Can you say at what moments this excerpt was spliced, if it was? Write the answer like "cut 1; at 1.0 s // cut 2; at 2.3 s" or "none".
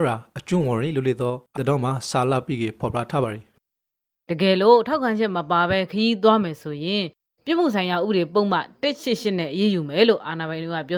cut 1; at 1.6 s